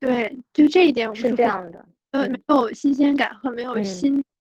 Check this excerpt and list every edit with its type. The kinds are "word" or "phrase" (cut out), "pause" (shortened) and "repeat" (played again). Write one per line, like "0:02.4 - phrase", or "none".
0:02.3 - word